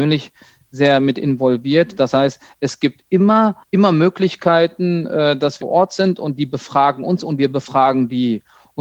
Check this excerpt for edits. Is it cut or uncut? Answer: cut